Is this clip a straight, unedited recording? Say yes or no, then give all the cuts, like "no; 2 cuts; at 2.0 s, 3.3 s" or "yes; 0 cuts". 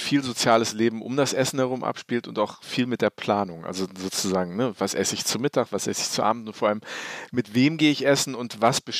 yes; 0 cuts